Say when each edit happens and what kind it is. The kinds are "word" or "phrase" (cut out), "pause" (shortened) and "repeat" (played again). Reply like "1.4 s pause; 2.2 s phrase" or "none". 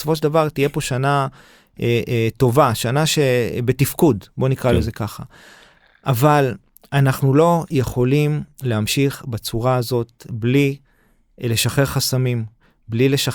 none